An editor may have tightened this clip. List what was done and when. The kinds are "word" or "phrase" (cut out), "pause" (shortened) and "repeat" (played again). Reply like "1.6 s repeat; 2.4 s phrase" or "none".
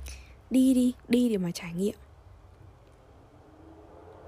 1.0 s pause